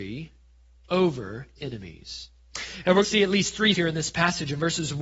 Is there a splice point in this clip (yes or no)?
yes